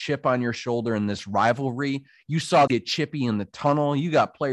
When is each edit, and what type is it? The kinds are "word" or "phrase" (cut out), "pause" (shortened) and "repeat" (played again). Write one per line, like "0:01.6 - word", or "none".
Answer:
0:02.7 - word